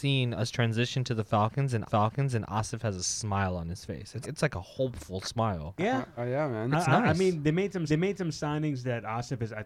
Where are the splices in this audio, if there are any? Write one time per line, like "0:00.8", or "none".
0:01.9
0:04.2
0:06.2
0:07.9